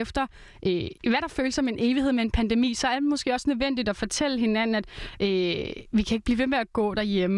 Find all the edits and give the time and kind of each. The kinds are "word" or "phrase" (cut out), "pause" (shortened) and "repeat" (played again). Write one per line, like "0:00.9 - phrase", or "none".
0:01.0 - pause